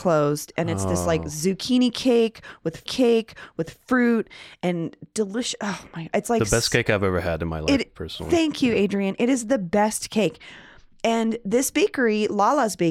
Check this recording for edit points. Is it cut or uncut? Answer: cut